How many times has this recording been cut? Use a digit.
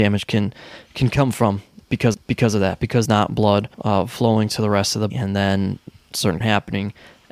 5